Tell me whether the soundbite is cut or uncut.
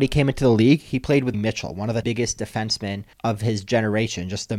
cut